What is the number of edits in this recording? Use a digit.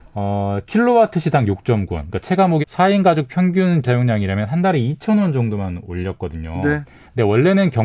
2